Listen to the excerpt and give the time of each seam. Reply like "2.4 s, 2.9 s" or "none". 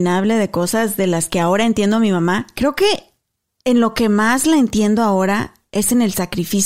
none

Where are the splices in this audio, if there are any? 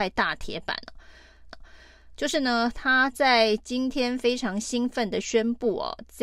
1.5 s

